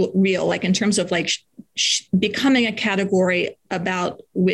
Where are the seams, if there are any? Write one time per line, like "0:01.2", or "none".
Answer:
0:03.6